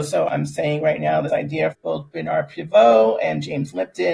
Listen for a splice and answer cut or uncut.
cut